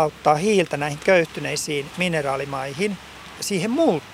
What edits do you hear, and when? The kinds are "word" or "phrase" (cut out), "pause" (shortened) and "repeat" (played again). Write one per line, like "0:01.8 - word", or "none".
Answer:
none